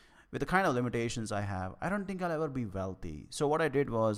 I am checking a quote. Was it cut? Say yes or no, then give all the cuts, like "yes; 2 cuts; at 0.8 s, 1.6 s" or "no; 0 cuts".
no; 0 cuts